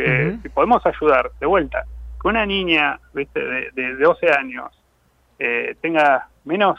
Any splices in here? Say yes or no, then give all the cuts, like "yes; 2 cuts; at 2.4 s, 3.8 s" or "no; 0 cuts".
no; 0 cuts